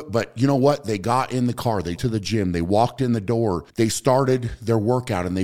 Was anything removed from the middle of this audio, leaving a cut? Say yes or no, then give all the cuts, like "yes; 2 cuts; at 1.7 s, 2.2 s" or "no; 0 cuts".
yes; 2 cuts; at 2.0 s, 3.7 s